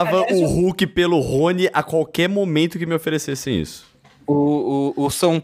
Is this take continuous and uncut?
yes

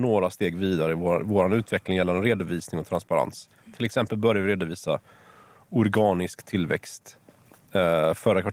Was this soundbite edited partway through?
no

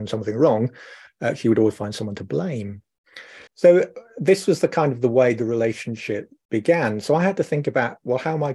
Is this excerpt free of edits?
no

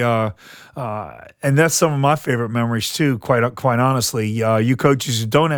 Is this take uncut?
yes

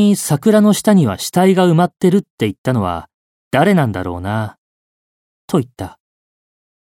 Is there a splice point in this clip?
no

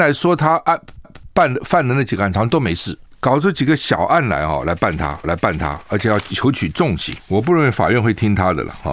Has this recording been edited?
yes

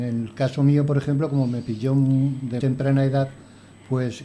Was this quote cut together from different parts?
yes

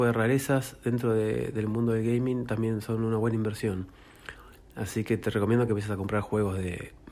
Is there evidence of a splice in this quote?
no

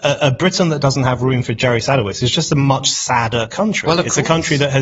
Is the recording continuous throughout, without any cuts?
yes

